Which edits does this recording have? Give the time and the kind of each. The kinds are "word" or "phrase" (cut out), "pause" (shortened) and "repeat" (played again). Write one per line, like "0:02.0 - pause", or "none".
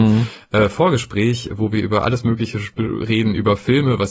none